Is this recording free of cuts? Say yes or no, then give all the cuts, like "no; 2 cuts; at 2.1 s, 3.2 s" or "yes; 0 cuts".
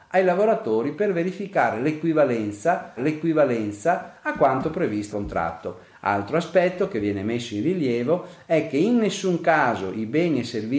no; 2 cuts; at 3.0 s, 5.1 s